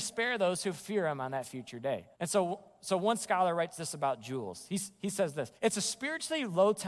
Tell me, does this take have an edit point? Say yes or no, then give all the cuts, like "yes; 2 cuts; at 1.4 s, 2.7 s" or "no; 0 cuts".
yes; 2 cuts; at 2.1 s, 5.5 s